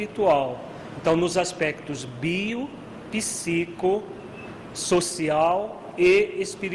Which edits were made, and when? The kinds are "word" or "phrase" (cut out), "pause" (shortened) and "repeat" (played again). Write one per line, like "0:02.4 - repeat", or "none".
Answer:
none